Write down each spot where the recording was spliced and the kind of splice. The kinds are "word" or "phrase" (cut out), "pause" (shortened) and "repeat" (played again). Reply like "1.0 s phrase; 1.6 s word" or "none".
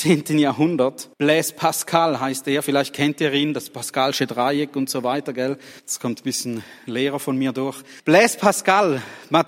1.1 s pause; 5.8 s pause; 8.0 s pause